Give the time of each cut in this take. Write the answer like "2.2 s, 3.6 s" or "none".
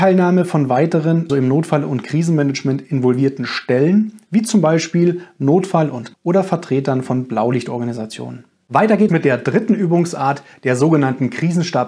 1.3 s, 6.1 s, 9.1 s